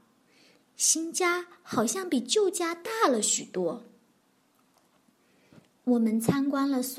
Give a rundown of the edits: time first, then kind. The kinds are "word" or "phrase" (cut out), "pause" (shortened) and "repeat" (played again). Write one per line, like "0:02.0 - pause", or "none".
none